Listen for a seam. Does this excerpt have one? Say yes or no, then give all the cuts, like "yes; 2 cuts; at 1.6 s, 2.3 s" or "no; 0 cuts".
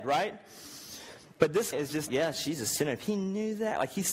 yes; 2 cuts; at 1.7 s, 2.1 s